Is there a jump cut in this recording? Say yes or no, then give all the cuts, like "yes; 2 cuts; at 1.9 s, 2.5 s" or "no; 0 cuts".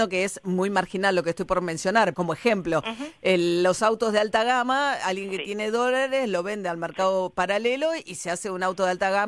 yes; 1 cut; at 2.1 s